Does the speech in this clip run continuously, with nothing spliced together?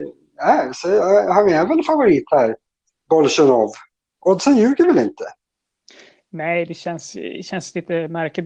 yes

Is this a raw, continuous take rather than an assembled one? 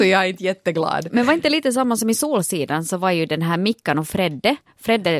yes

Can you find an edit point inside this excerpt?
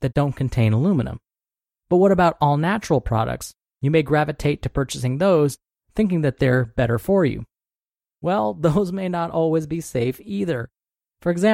no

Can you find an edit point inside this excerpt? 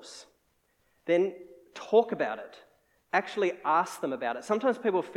no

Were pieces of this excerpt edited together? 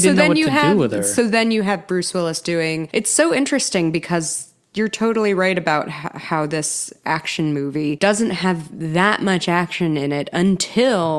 no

